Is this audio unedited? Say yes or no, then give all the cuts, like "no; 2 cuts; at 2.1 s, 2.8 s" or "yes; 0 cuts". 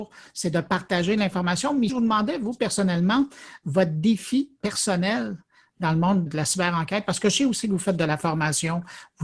no; 2 cuts; at 1.9 s, 6.3 s